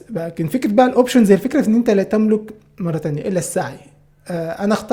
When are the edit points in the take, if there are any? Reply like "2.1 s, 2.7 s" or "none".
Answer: none

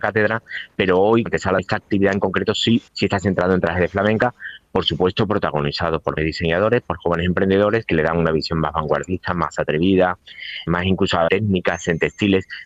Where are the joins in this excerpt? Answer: 1.3 s, 1.6 s, 2.9 s, 6.2 s, 10.7 s, 11.3 s

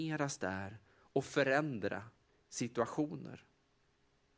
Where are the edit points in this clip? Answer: none

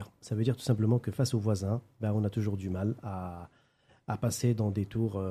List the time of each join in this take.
none

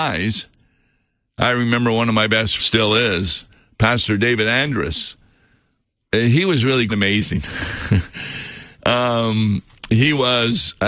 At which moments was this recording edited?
2.6 s, 6.9 s

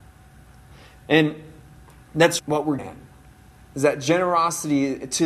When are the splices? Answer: 2.4 s, 2.8 s

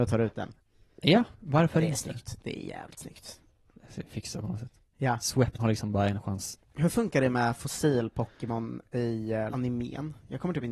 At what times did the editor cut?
1.3 s, 5.6 s, 9.5 s

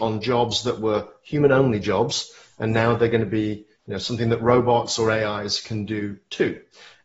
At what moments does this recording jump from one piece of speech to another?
none

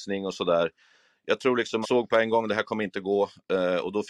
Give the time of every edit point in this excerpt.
1.8 s

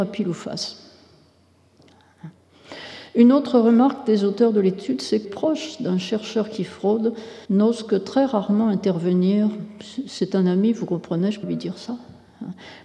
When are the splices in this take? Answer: 5.2 s, 7.4 s, 11.4 s

